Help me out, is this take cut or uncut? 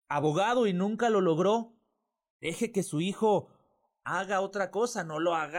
uncut